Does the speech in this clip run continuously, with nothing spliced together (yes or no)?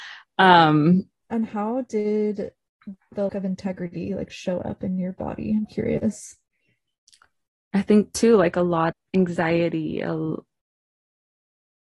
no